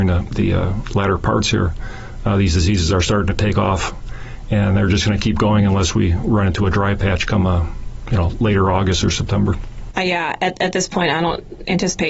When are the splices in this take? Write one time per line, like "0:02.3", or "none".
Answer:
none